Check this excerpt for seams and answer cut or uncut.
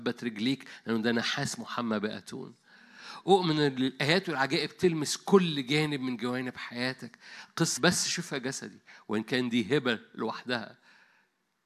cut